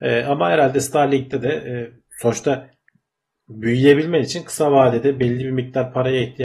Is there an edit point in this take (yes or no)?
no